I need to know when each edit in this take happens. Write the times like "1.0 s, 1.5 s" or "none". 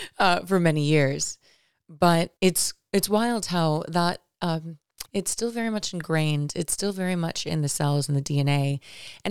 2.4 s, 5.1 s

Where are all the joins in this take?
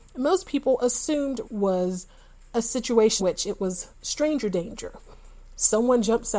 1.4 s, 3.2 s, 3.9 s

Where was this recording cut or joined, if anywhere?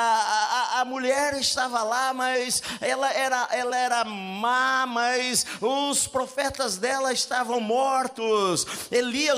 none

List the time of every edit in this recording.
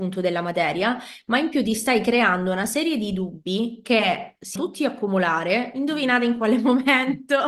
4.6 s

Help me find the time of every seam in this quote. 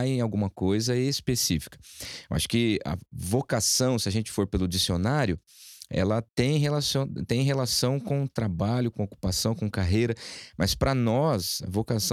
3.1 s, 6.3 s

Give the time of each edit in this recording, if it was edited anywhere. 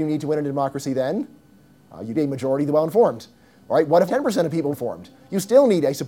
2.1 s, 4.1 s, 4.7 s

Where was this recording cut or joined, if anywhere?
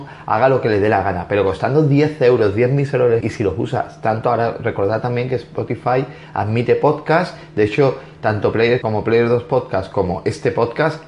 3.2 s, 8.8 s

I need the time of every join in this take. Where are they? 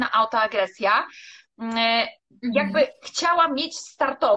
none

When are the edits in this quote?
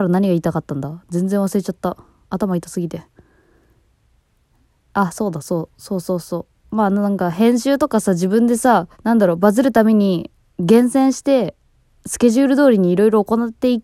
8.9 s

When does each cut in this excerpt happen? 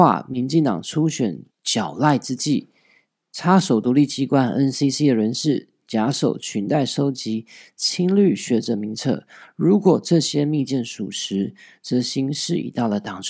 1.5 s

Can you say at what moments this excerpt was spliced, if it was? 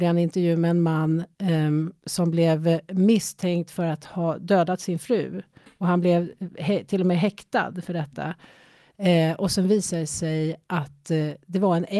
none

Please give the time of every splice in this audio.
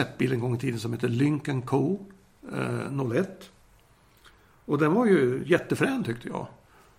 none

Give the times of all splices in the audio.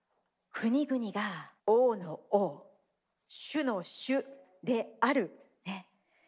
1.6 s

